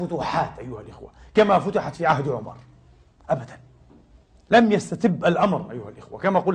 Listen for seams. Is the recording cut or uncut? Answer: uncut